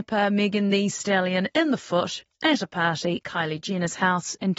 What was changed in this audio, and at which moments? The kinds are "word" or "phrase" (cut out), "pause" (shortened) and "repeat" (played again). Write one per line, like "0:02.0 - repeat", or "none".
0:03.2 - word